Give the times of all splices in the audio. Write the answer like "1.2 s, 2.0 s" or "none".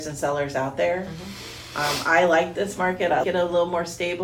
3.2 s